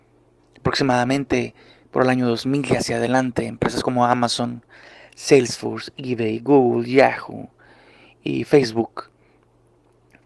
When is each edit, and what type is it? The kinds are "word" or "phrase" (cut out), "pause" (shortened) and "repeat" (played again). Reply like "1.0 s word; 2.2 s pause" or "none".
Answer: none